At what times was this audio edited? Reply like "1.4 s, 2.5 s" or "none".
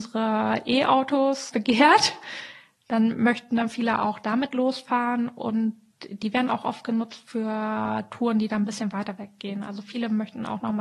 1.5 s